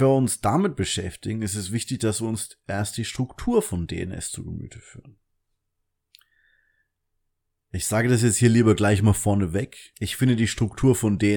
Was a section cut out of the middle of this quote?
no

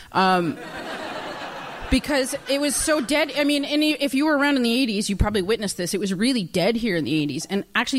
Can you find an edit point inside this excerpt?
no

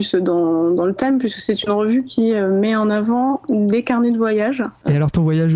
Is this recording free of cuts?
yes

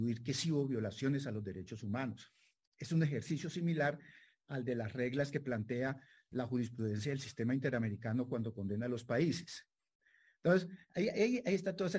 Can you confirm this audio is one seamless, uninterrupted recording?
yes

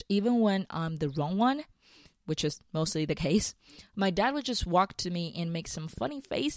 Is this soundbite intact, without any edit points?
yes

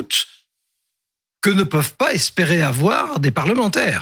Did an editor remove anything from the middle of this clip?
no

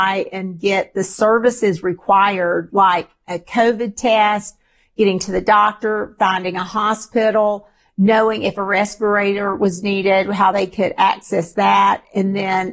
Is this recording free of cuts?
yes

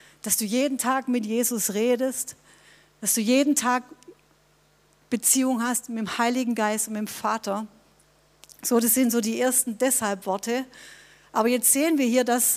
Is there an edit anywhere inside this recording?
no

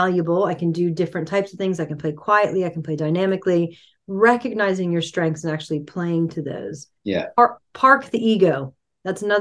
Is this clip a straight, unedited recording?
no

